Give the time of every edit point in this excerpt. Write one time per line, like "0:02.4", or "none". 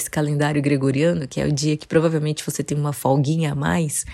none